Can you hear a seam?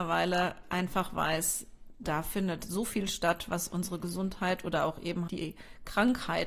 yes; 1 cut; at 5.3 s

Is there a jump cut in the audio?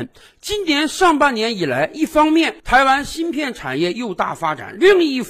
yes; 1 cut; at 2.6 s

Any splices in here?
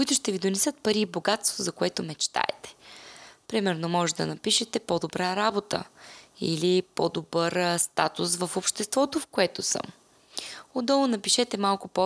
no; 0 cuts

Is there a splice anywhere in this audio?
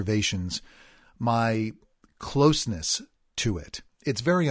no; 0 cuts

